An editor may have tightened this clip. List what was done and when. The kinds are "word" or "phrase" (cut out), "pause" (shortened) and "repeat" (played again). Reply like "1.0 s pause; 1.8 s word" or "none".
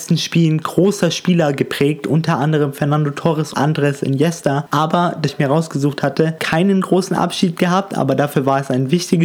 3.5 s word; 5.3 s phrase; 6.4 s word